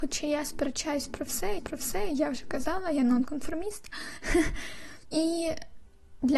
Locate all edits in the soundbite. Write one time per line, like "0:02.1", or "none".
0:01.6